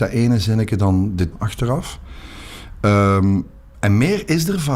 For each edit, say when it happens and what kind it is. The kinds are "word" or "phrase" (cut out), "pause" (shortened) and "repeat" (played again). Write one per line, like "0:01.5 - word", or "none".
0:01.3 - word

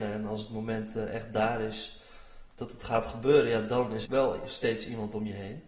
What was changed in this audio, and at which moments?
0:04.1 - word

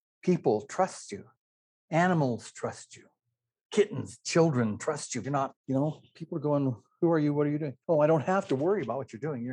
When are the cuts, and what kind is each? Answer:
0:05.2 - word

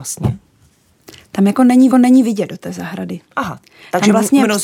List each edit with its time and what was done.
0:01.9 - repeat

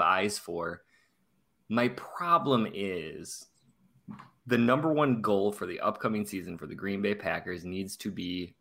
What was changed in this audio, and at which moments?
none

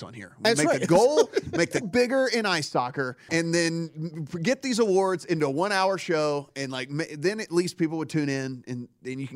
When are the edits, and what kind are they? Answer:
0:01.8 - word
0:03.3 - word

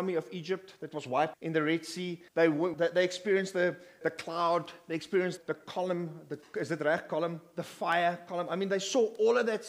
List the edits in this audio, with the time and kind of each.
0:01.3 - word
0:02.3 - pause
0:02.7 - phrase
0:04.0 - word
0:05.4 - word

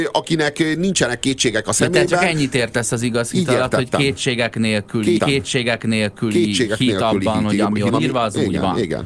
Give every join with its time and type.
0:05.2 - repeat
0:07.9 - phrase

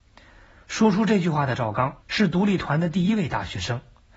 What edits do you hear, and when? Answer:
0:02.0 - pause

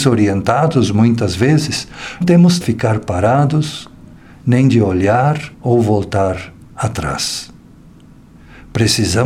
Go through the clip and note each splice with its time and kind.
0:02.2 - word
0:02.6 - phrase
0:05.5 - pause

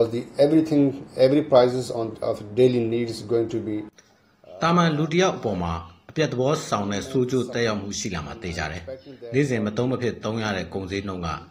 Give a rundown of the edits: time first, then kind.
0:02.2 - word

